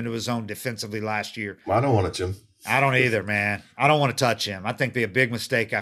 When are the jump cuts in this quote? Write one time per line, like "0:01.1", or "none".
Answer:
0:02.1
0:04.9